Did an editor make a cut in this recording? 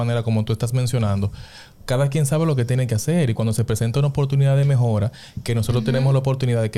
no; 0 cuts

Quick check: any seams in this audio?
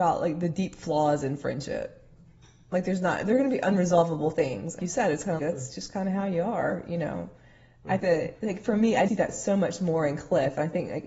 yes; 4 cuts; at 4.8 s, 5.4 s, 8.0 s, 9.1 s

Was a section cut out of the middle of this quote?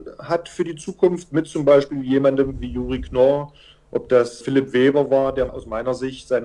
no; 0 cuts

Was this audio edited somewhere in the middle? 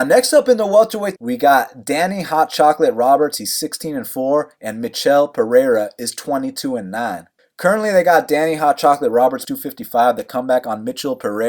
yes; 3 cuts; at 1.2 s, 7.4 s, 9.4 s

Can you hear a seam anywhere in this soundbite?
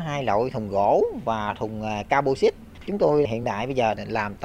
no; 0 cuts

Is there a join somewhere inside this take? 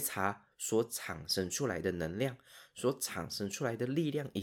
no; 0 cuts

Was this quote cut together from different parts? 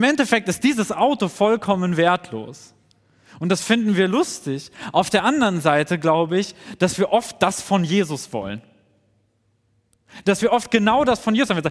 no; 0 cuts

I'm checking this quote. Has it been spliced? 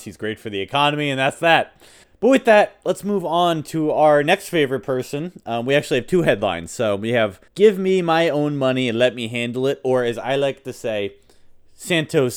yes; 2 cuts; at 2.0 s, 7.5 s

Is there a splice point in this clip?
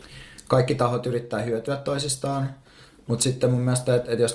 no; 0 cuts

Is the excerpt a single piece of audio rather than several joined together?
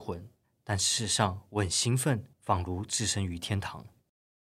no; 1 cut; at 2.3 s

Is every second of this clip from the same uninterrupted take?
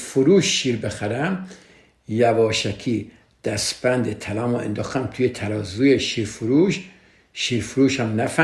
yes; 0 cuts

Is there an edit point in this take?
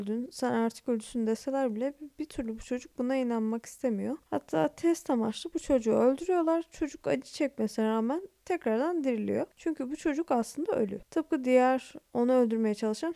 yes; 1 cut; at 9.5 s

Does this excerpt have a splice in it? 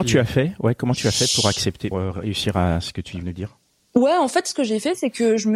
yes; 2 cuts; at 1.9 s, 3.2 s

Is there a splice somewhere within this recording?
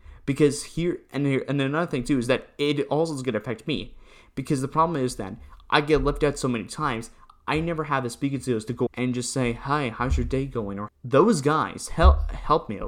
yes; 2 cuts; at 8.9 s, 10.9 s

